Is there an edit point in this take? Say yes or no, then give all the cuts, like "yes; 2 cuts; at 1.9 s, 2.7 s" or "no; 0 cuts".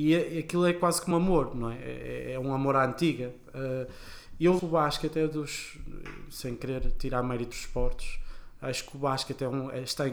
yes; 3 cuts; at 1.1 s, 4.6 s, 7.5 s